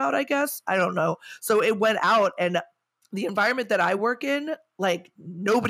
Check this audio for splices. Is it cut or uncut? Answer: uncut